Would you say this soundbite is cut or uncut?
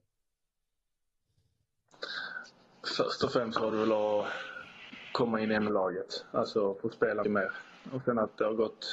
cut